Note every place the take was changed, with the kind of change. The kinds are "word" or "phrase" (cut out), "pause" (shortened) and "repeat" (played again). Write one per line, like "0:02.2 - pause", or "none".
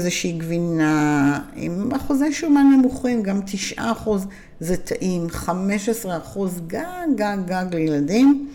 none

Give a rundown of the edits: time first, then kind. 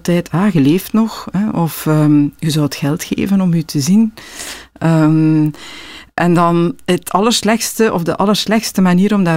none

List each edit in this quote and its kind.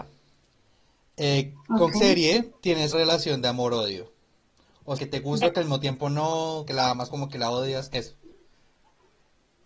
0:01.9 - word
0:02.9 - word
0:05.0 - word
0:05.4 - word
0:06.7 - word
0:07.1 - word

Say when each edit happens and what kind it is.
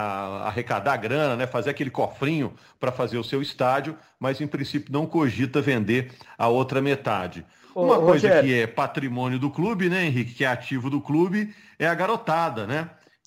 none

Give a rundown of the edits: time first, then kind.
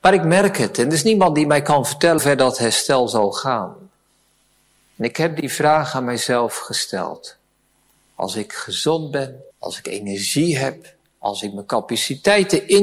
0:02.2 - word
0:09.5 - pause

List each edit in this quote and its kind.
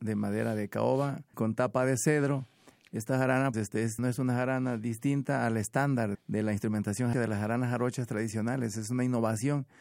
0:01.3 - word
0:03.5 - word
0:04.0 - word
0:06.1 - word
0:07.1 - word

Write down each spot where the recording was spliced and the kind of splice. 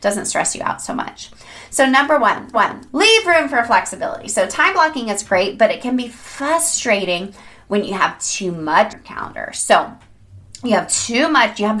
0:02.5 - repeat
0:08.9 - word

